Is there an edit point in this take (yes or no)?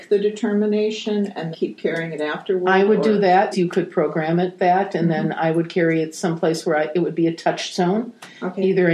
yes